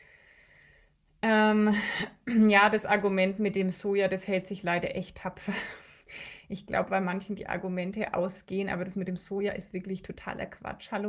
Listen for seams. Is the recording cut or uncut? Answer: uncut